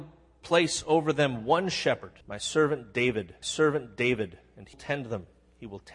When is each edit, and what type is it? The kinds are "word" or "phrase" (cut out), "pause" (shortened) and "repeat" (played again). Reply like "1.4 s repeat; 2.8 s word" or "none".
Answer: 2.2 s pause; 3.4 s repeat; 4.7 s word